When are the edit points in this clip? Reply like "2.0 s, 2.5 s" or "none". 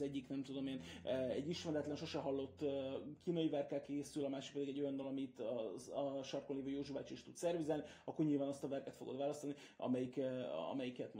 none